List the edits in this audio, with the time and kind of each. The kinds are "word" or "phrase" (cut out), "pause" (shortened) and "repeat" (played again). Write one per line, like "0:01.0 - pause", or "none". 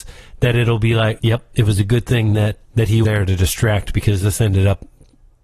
0:01.2 - word
0:02.6 - word
0:03.0 - word